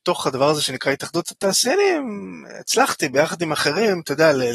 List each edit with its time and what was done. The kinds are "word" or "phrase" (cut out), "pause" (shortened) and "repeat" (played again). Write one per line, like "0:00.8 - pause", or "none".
none